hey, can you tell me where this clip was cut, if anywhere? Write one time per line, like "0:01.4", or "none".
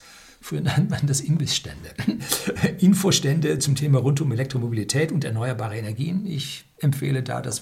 none